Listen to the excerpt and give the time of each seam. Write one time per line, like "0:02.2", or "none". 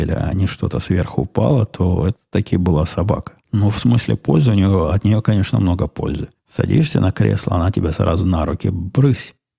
0:03.4
0:06.4